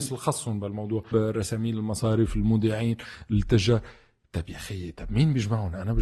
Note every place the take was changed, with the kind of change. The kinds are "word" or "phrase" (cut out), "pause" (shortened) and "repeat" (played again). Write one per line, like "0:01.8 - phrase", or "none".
0:01.1 - word